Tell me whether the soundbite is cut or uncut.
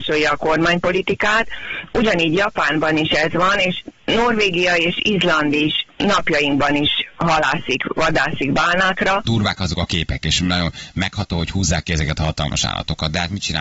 uncut